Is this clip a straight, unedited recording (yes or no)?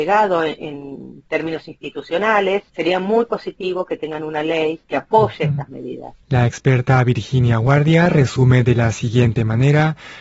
no